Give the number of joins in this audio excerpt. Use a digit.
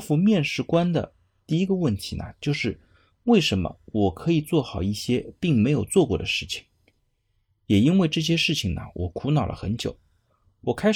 0